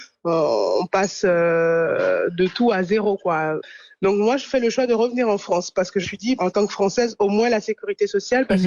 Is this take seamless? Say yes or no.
no